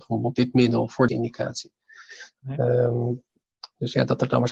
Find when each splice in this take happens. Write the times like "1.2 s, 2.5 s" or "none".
1.1 s